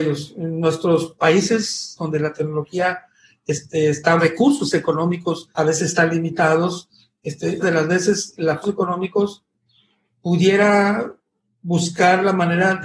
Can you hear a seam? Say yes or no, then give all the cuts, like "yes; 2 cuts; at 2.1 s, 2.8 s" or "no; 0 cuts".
yes; 5 cuts; at 2.0 s, 4.2 s, 5.5 s, 7.6 s, 8.6 s